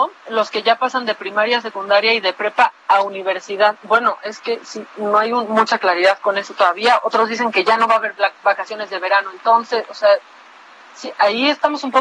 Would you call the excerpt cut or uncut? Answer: uncut